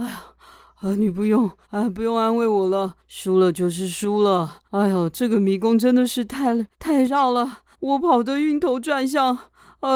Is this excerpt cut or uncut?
cut